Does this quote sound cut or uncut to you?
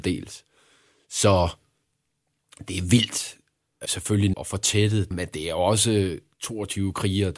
cut